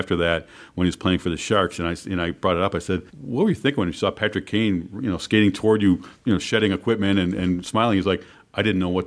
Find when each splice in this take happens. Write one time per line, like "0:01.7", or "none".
0:03.1
0:06.2